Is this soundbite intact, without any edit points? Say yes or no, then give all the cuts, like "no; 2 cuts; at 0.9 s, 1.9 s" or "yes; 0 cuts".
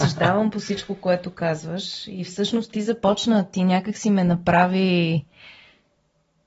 yes; 0 cuts